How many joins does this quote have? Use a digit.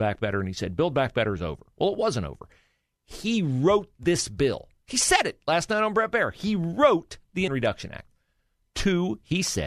1